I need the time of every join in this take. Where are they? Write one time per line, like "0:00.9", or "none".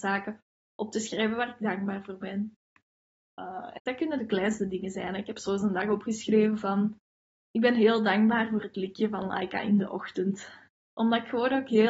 0:03.8